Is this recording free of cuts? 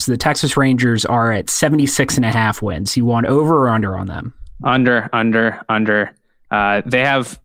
yes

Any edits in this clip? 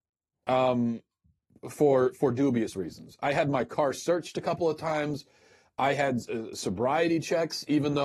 no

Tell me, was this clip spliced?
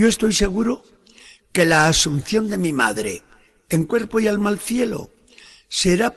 no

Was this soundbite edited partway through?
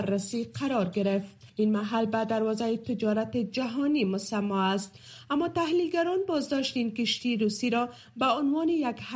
yes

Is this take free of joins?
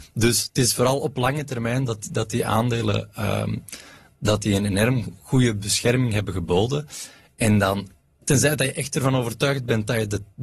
yes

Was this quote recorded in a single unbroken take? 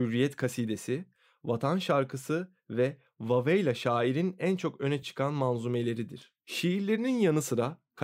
yes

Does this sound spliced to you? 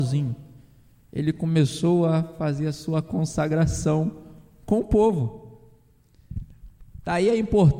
no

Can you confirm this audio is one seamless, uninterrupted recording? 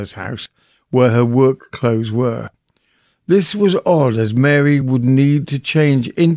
yes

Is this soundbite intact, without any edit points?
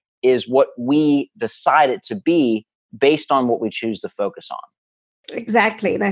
yes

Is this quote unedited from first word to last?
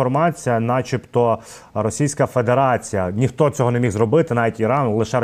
yes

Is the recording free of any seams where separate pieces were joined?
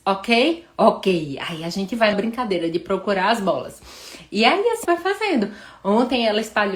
no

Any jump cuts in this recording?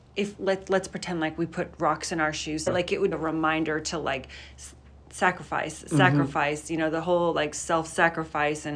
yes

